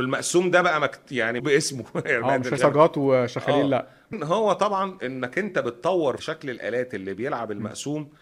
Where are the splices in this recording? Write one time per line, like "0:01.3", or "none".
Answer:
0:01.4
0:02.6
0:04.1
0:06.2